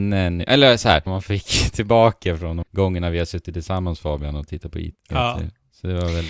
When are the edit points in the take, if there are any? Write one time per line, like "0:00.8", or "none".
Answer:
0:01.1
0:02.6

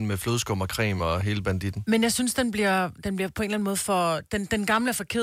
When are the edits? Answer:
none

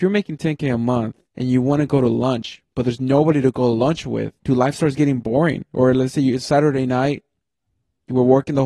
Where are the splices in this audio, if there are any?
0:01.3
0:04.4

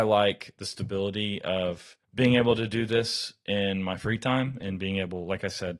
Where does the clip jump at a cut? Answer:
0:02.0

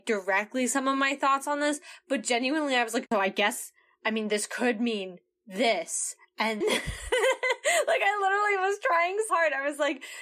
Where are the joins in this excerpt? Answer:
0:03.1
0:06.6
0:09.3

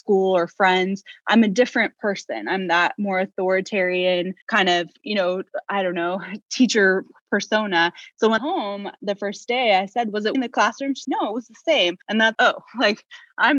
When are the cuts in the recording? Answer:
0:04.4
0:08.4
0:10.3
0:11.0
0:12.0
0:12.3

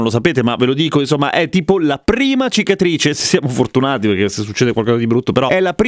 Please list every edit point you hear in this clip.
none

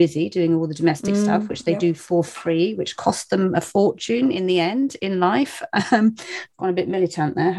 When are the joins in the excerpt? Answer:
none

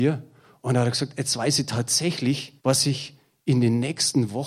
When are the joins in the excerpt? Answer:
0:02.6

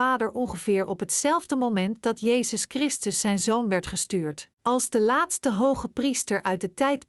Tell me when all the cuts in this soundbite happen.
0:04.5

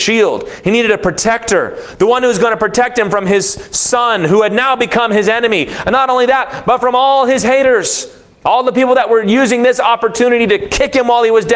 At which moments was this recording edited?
none

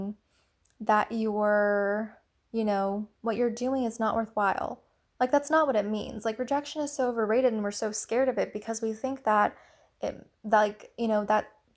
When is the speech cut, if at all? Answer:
none

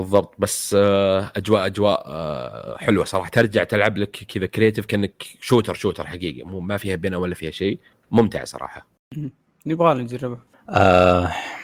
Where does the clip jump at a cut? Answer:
none

